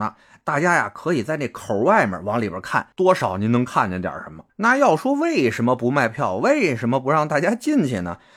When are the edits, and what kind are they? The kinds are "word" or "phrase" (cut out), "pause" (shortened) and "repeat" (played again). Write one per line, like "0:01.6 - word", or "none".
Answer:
0:02.9 - pause
0:04.5 - pause